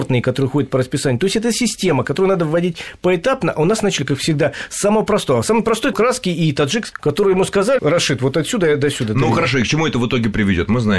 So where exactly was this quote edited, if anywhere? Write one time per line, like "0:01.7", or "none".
0:05.9
0:06.9
0:07.8